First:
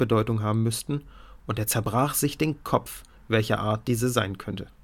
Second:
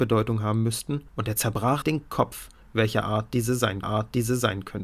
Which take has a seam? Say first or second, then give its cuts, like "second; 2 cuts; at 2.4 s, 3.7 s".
second; 3 cuts; at 1.1 s, 1.8 s, 3.8 s